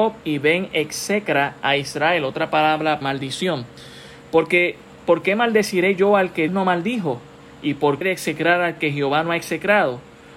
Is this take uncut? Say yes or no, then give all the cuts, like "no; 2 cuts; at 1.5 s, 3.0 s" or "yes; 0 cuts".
no; 3 cuts; at 3.0 s, 6.5 s, 8.0 s